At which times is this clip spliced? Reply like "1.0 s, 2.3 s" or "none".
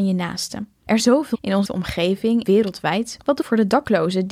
1.0 s, 1.3 s, 1.6 s, 2.4 s, 3.4 s

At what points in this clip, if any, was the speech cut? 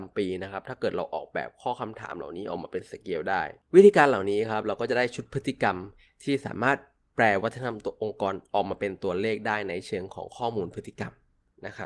none

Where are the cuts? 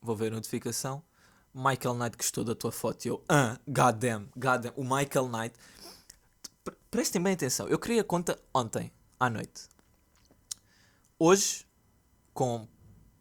none

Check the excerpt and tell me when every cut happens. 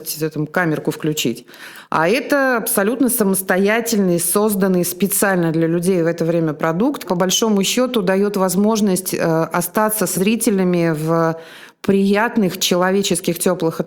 7.0 s, 10.1 s

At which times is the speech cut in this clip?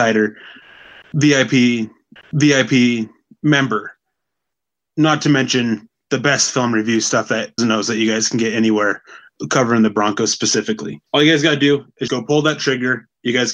2.2 s, 7.6 s, 11.1 s, 12.1 s

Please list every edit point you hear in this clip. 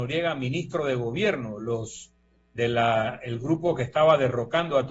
none

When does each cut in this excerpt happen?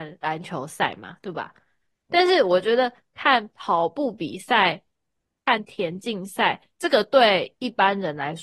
none

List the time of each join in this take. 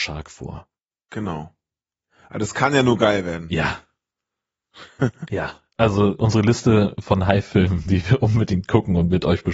none

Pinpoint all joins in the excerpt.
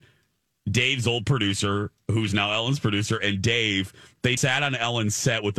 4.4 s

